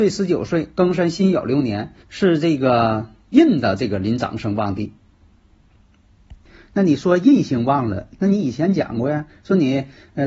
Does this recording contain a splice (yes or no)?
yes